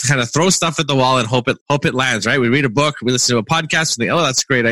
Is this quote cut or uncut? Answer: cut